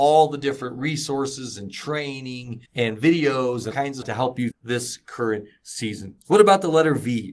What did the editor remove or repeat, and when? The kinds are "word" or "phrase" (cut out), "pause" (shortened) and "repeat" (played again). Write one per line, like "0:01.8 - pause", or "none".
0:02.7 - pause
0:03.7 - word
0:04.0 - phrase
0:04.5 - word